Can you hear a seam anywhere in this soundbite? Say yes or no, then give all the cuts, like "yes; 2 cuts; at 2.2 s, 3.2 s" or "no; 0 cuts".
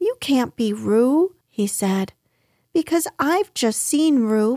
yes; 1 cut; at 1.4 s